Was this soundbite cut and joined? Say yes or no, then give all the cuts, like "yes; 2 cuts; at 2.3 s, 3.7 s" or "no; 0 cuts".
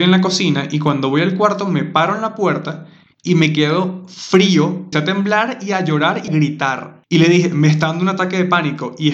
yes; 2 cuts; at 4.9 s, 6.3 s